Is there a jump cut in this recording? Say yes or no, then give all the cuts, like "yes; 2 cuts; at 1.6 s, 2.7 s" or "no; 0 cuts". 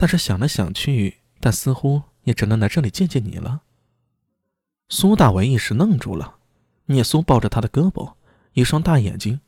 no; 0 cuts